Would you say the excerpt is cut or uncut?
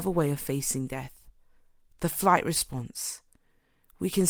uncut